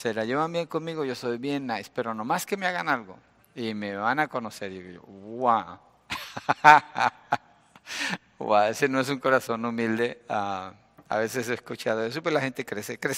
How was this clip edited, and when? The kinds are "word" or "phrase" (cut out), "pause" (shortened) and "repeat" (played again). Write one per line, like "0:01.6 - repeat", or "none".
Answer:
0:03.4 - pause